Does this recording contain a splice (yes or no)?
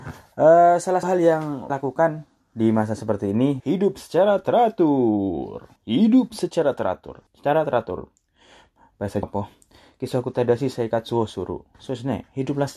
yes